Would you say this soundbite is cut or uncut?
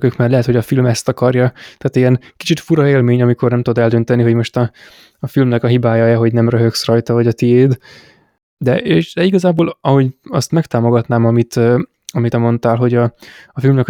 cut